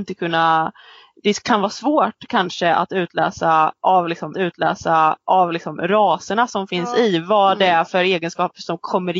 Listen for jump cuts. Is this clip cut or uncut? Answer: cut